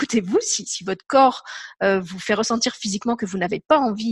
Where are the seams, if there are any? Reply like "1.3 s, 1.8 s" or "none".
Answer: none